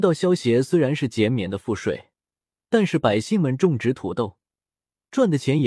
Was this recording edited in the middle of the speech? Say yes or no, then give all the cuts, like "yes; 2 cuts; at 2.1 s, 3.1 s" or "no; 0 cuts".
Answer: no; 0 cuts